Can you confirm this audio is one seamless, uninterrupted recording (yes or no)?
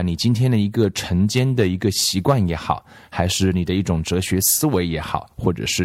yes